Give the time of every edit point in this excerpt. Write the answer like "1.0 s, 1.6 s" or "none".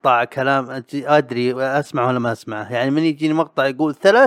none